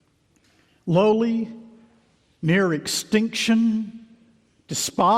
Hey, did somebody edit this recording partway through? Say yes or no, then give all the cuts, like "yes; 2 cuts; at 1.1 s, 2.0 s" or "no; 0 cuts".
no; 0 cuts